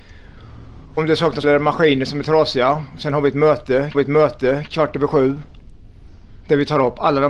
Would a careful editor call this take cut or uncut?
cut